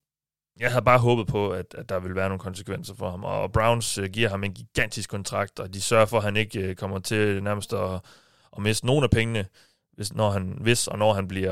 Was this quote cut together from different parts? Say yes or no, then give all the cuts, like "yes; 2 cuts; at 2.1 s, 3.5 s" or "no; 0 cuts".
no; 0 cuts